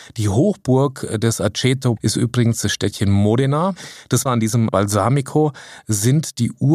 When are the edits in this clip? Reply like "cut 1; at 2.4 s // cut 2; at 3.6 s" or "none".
cut 1; at 2.0 s // cut 2; at 4.3 s // cut 3; at 4.7 s